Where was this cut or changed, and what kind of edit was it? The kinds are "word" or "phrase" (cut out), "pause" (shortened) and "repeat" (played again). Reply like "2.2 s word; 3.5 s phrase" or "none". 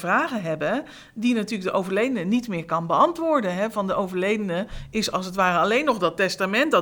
none

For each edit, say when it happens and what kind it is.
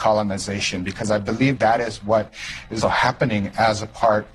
1.6 s word; 2.8 s word

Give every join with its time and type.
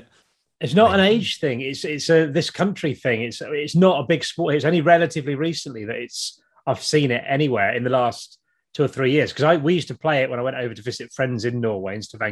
none

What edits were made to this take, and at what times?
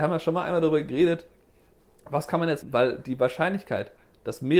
2.6 s word

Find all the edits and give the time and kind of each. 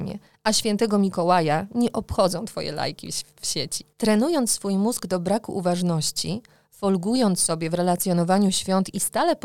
3.9 s pause

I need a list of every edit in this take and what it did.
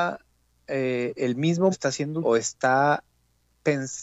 1.7 s word; 2.2 s word

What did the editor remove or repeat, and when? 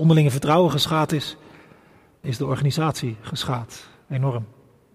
2.2 s word

